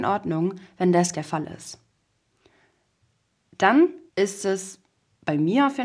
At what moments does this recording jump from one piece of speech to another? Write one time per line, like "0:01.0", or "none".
0:01.1
0:04.1

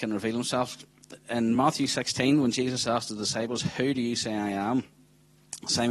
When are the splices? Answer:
none

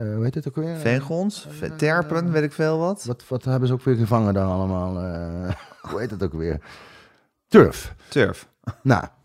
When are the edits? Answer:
none

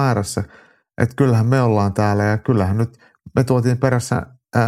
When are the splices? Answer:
none

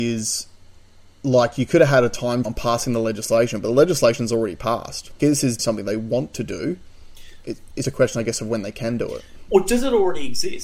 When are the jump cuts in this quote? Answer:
0:02.4
0:05.2
0:05.6
0:07.8

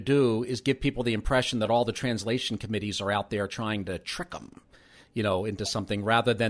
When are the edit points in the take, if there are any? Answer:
none

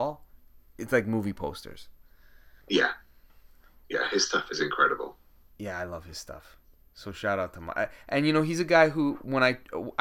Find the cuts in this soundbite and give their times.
0:02.6

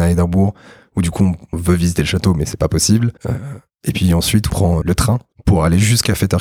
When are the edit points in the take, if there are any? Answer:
0:01.5
0:03.2
0:04.5
0:04.8
0:05.3

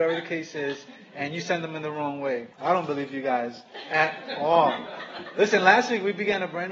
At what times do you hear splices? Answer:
0:02.5

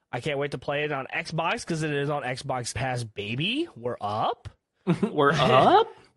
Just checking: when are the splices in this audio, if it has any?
0:02.7

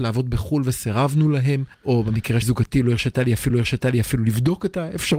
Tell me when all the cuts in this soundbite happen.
0:01.7
0:02.4
0:03.5

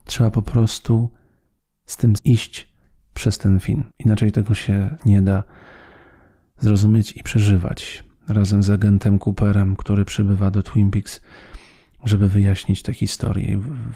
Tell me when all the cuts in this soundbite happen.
0:02.2
0:03.9
0:05.0

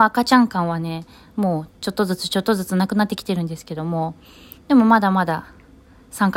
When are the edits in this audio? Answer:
none

